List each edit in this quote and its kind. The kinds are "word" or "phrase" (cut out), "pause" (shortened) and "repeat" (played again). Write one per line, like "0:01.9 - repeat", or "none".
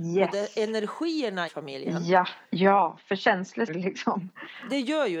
0:01.5 - word
0:02.4 - pause
0:03.7 - word